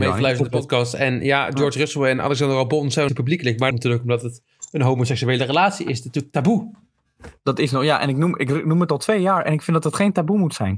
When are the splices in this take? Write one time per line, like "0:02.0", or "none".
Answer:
0:03.1
0:03.7

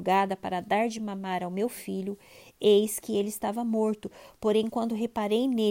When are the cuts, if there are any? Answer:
none

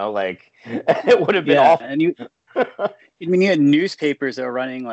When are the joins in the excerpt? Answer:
none

